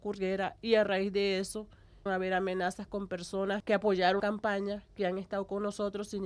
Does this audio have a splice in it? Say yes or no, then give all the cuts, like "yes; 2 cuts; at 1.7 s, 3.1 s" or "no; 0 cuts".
yes; 2 cuts; at 2.1 s, 4.2 s